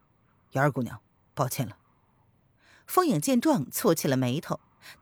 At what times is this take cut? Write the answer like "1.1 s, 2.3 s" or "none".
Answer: none